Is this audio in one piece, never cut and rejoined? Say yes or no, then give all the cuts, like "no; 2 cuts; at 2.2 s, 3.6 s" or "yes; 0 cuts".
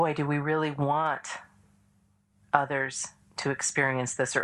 yes; 0 cuts